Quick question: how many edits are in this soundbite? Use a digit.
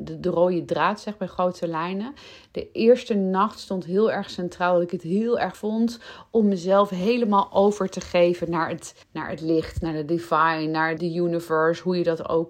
3